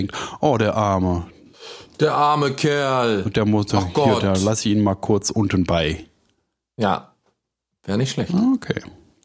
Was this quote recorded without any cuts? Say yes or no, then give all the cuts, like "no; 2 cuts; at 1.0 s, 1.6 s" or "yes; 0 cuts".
yes; 0 cuts